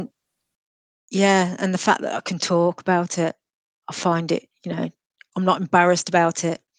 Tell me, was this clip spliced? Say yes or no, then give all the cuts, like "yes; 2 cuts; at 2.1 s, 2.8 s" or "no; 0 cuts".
no; 0 cuts